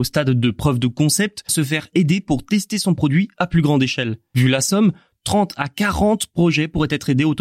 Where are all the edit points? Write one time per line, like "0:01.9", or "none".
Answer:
0:01.5